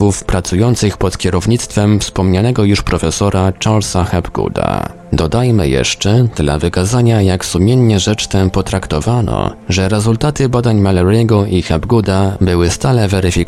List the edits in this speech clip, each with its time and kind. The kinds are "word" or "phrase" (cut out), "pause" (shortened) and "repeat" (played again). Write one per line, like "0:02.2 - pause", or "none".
none